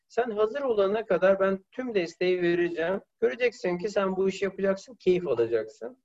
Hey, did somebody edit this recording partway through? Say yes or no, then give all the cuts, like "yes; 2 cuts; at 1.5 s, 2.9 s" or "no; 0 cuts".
yes; 1 cut; at 3.1 s